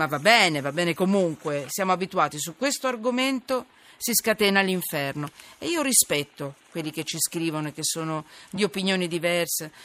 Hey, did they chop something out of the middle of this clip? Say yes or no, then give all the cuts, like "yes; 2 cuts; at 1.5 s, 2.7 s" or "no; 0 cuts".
no; 0 cuts